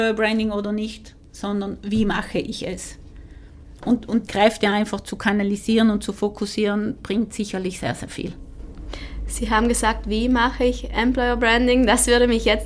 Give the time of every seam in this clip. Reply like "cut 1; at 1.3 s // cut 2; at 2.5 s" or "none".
cut 1; at 4.3 s